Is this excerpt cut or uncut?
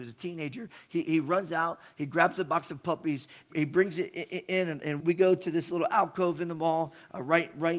cut